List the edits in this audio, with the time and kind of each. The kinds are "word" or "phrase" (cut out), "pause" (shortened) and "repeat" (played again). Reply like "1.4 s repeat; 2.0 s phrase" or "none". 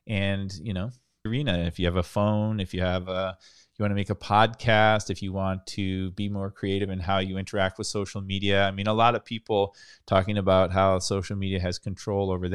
1.3 s phrase